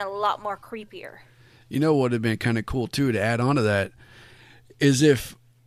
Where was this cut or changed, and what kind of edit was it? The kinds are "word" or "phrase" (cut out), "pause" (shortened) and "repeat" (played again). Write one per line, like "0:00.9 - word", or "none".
none